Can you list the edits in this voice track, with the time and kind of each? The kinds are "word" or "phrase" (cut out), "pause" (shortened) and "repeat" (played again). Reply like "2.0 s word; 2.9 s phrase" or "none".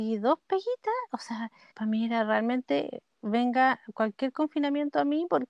1.7 s pause